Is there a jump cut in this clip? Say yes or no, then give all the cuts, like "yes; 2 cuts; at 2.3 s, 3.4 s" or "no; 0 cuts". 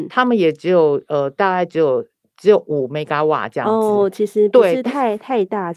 no; 0 cuts